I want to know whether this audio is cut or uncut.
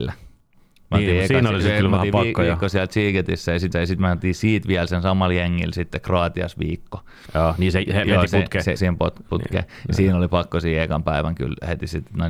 cut